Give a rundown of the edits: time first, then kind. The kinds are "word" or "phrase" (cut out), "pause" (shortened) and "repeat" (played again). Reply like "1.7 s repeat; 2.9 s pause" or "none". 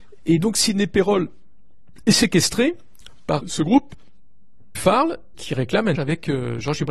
3.4 s word; 4.7 s word; 5.3 s word; 5.9 s word